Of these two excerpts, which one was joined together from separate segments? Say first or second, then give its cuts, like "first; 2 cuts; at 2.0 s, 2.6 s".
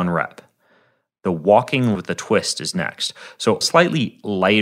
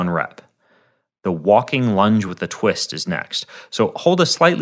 first; 2 cuts; at 1.9 s, 3.6 s